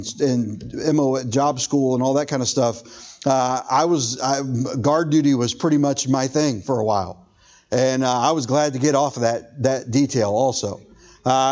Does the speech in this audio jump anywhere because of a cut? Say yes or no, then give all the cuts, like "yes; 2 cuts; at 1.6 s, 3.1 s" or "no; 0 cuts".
no; 0 cuts